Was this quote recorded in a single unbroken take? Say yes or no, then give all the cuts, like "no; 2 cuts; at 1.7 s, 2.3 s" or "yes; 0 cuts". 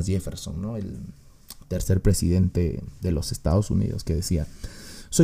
yes; 0 cuts